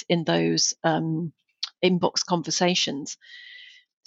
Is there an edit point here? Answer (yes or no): no